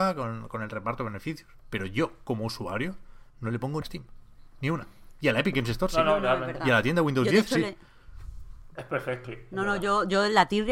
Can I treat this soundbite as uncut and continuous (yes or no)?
no